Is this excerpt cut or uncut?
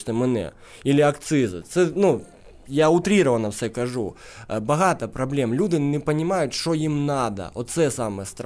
uncut